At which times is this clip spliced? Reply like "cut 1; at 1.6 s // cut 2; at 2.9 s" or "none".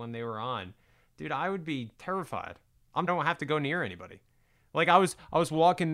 cut 1; at 1.9 s // cut 2; at 3.1 s

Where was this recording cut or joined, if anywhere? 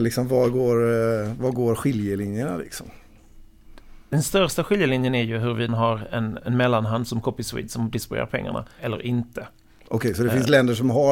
cut 1; at 5.7 s // cut 2; at 6.4 s // cut 3; at 8.8 s

